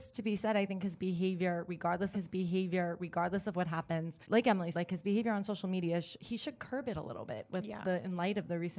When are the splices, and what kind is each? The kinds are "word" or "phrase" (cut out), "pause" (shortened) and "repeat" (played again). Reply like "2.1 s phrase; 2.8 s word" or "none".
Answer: 2.1 s repeat; 4.2 s pause; 4.7 s word